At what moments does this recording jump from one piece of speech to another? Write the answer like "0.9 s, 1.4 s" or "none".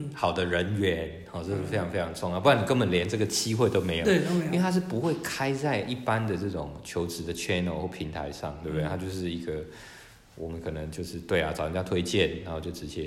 none